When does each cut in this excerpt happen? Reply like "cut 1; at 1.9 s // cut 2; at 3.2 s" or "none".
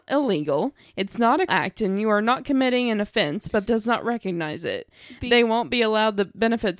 cut 1; at 1.5 s // cut 2; at 3.7 s